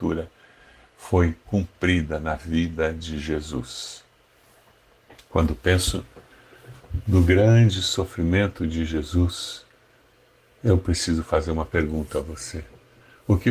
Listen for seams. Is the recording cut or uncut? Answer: uncut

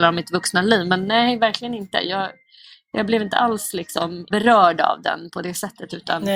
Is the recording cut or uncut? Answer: cut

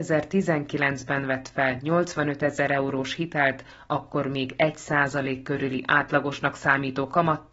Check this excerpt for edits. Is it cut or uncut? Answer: uncut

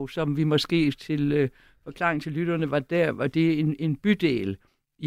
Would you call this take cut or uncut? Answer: uncut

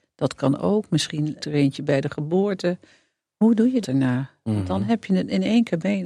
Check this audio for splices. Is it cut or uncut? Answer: cut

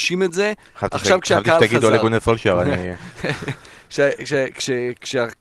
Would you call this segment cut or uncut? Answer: uncut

